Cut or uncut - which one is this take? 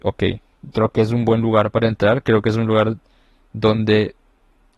uncut